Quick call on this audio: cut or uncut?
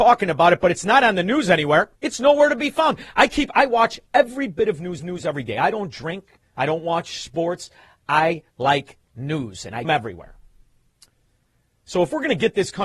cut